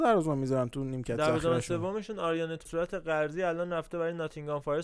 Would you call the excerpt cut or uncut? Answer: cut